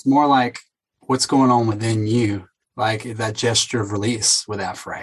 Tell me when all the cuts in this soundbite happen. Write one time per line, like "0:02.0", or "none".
none

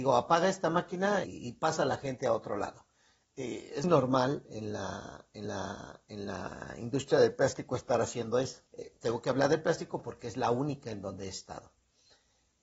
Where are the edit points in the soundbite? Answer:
0:01.2
0:03.8
0:05.4
0:08.7

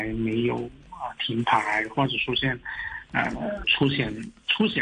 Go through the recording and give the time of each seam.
0:03.6

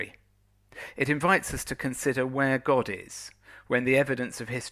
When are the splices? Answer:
none

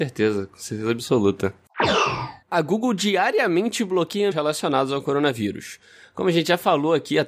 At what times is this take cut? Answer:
0:02.4
0:04.3

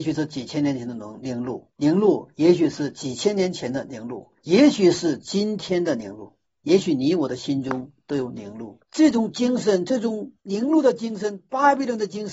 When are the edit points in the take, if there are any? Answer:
0:01.7
0:04.4
0:06.5
0:08.8

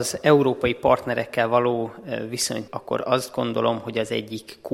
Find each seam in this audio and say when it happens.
0:02.7

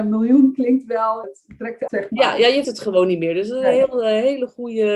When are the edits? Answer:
0:01.2
0:01.9
0:02.6

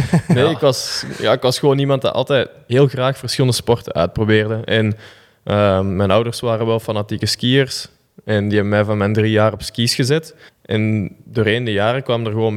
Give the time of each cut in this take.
0:10.5

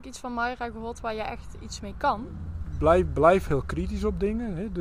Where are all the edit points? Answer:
none

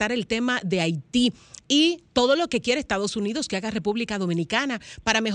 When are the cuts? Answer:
none

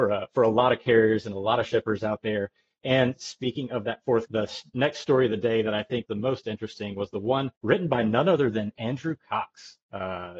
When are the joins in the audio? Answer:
0:04.3
0:06.1
0:07.6

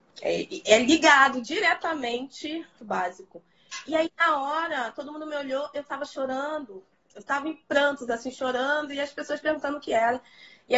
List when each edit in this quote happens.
0:02.8

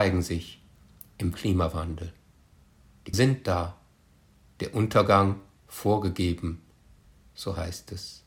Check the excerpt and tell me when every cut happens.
0:01.3
0:03.1

